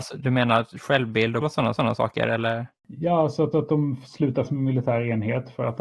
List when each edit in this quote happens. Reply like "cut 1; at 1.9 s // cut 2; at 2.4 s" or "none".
cut 1; at 1.4 s // cut 2; at 1.8 s // cut 3; at 2.8 s // cut 4; at 3.5 s // cut 5; at 4.4 s

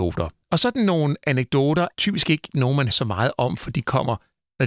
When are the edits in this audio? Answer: cut 1; at 1.9 s // cut 2; at 2.9 s

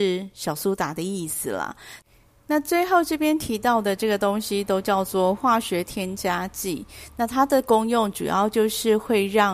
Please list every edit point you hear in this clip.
none

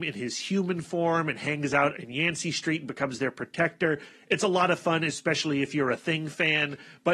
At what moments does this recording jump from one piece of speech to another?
none

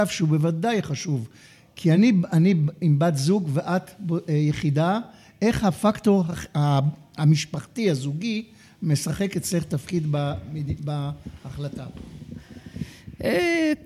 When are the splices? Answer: none

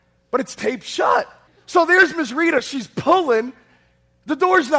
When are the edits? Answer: cut 1; at 1.5 s

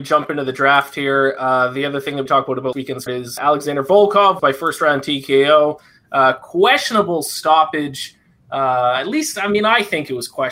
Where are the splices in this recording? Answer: cut 1; at 2.3 s // cut 2; at 2.7 s // cut 3; at 3.1 s // cut 4; at 3.4 s // cut 5; at 4.4 s

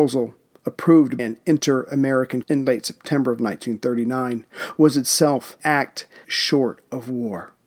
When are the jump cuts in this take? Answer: cut 1; at 1.2 s // cut 2; at 2.4 s // cut 3; at 5.6 s // cut 4; at 6.2 s

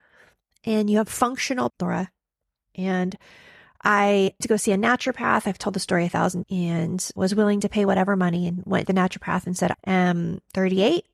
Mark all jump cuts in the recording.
cut 1; at 1.7 s // cut 2; at 4.4 s // cut 3; at 6.4 s // cut 4; at 7.2 s // cut 5; at 8.9 s // cut 6; at 9.7 s

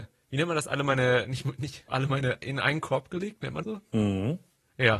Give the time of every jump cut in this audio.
cut 1; at 1.2 s // cut 2; at 1.9 s // cut 3; at 2.4 s // cut 4; at 3.6 s

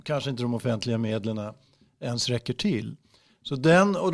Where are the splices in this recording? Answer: none

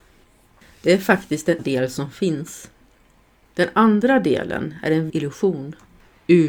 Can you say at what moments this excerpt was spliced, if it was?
cut 1; at 1.6 s // cut 2; at 5.1 s

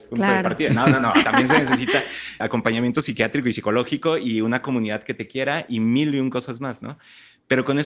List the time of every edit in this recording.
cut 1; at 1.2 s // cut 2; at 2.4 s

